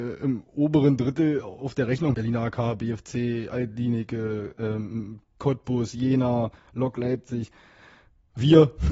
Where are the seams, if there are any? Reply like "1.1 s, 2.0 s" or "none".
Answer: 2.1 s